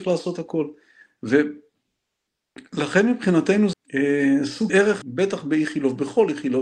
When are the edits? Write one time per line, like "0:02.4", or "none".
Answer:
0:03.7
0:04.7
0:05.0